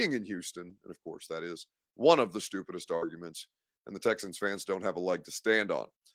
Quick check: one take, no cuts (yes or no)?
yes